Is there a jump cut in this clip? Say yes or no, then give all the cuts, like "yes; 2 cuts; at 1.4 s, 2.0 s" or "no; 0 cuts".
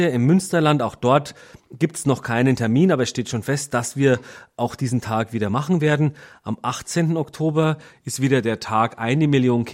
no; 0 cuts